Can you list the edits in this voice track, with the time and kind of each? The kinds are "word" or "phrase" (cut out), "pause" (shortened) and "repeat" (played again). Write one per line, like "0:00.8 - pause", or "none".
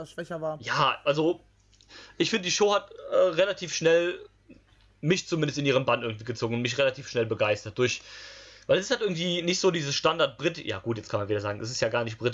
none

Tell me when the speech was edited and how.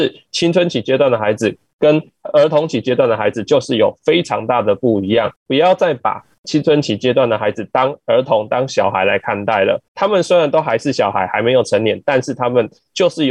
0:05.4 - pause
0:09.9 - pause

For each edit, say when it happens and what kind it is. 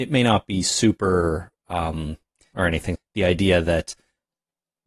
0:02.5 - word
0:02.9 - phrase

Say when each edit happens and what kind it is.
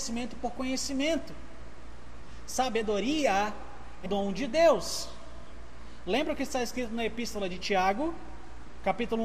0:04.1 - word

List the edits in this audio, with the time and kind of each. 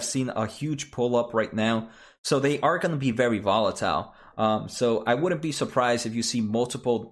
none

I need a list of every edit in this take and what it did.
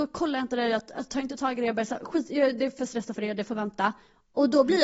none

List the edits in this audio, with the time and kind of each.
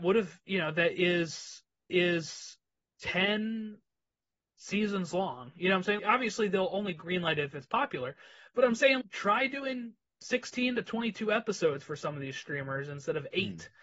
0:01.9 - repeat
0:06.0 - word
0:09.0 - word

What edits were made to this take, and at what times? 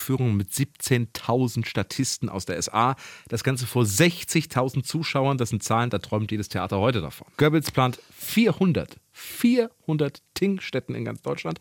0:07.3 - pause

